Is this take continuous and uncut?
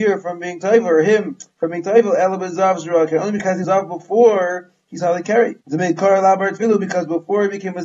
no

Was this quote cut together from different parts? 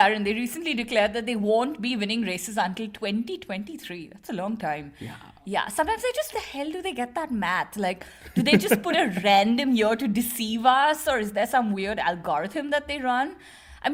yes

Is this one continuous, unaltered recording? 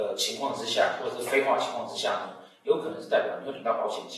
yes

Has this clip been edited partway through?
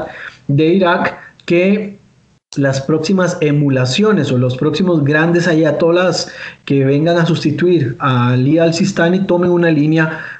no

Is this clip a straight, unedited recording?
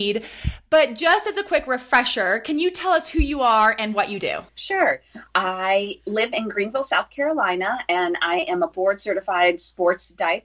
no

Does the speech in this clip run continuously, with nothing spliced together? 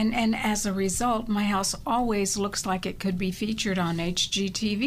yes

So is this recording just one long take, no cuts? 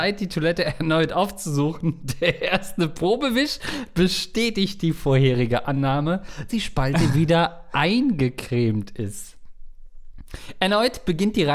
no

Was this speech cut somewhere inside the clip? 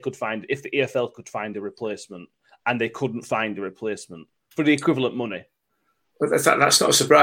no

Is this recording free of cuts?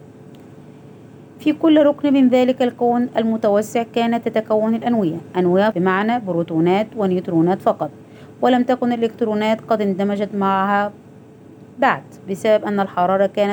no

